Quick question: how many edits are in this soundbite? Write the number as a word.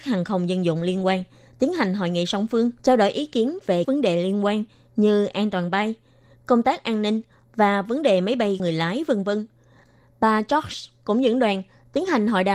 three